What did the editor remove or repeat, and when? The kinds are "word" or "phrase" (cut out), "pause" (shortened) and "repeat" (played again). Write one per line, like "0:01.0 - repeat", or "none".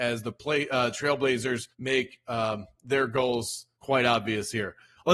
0:01.7 - pause
0:03.7 - pause